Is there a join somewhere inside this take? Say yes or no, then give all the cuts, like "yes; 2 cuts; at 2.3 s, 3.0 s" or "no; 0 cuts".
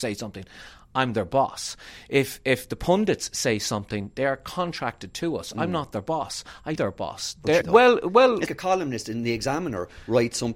yes; 3 cuts; at 6.8 s, 7.6 s, 8.5 s